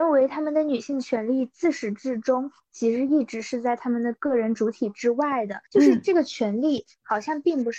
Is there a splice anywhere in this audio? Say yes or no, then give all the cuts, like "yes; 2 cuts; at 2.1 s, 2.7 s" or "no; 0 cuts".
yes; 1 cut; at 5.7 s